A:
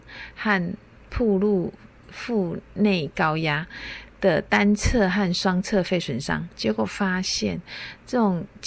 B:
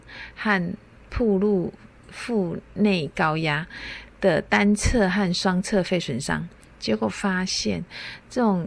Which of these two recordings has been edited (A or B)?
A